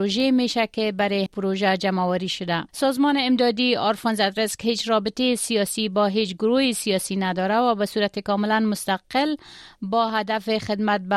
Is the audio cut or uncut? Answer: cut